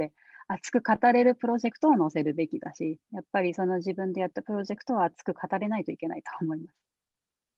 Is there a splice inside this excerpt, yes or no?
yes